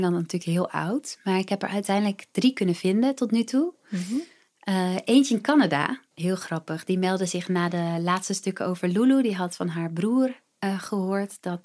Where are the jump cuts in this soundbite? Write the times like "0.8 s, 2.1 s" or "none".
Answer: 6.1 s